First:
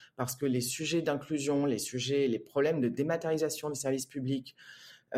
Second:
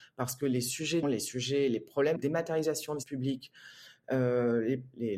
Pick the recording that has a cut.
second; 3 cuts; at 1.0 s, 2.2 s, 3.0 s

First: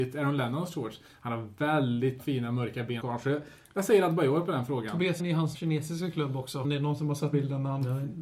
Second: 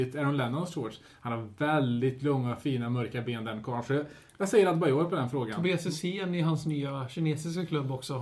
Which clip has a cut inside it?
first; 6 cuts; at 2.2 s, 3.0 s, 5.2 s, 5.5 s, 6.6 s, 7.3 s

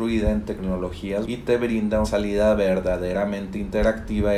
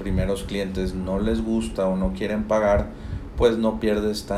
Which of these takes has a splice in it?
first; 2 cuts; at 1.2 s, 2.0 s

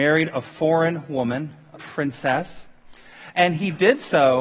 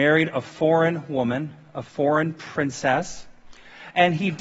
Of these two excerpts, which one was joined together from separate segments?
first; 1 cut; at 1.7 s

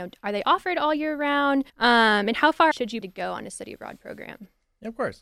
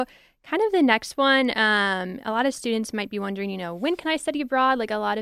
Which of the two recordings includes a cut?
first; 3 cuts; at 1.7 s, 2.7 s, 3.0 s

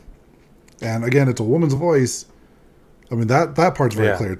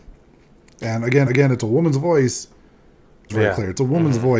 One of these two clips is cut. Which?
second; 2 cuts; at 1.3 s, 3.3 s

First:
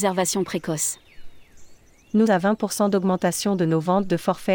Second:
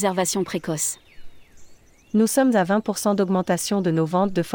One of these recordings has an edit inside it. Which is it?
first; 1 cut; at 2.3 s

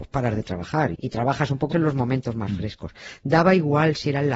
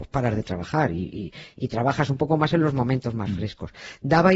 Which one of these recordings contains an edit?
first; 2 cuts; at 0.9 s, 1.7 s

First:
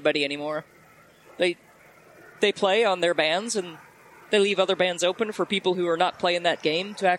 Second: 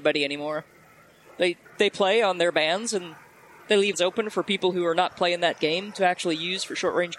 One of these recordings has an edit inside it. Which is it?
second; 2 cuts; at 1.7 s, 3.9 s

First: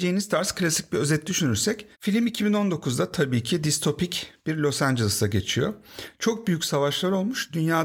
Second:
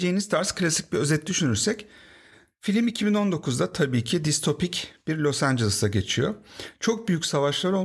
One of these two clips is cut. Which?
first; 1 cut; at 1.9 s

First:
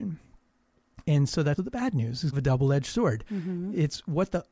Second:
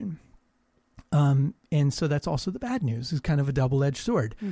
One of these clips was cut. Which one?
first; 3 cuts; at 1.0 s, 1.6 s, 2.3 s

